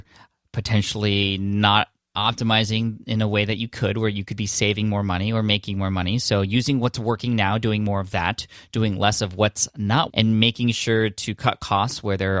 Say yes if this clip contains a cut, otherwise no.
yes